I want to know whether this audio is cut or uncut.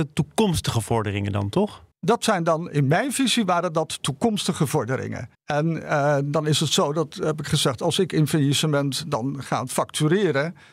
cut